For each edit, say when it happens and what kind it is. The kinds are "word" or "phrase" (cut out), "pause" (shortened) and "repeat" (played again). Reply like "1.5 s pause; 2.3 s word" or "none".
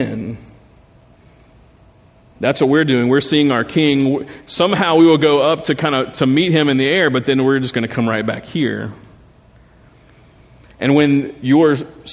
none